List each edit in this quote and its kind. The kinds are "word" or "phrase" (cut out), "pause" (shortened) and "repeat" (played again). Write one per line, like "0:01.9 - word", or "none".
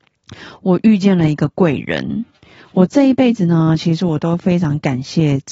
none